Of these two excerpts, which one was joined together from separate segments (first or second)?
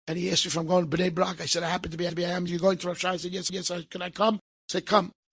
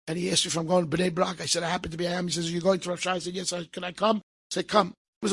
first